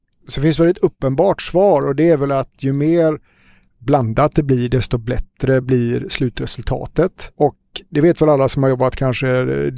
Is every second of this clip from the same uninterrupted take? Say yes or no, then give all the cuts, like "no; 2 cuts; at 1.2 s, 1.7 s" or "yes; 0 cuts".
yes; 0 cuts